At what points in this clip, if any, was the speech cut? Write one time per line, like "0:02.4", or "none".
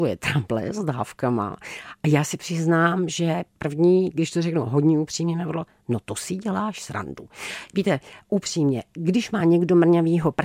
none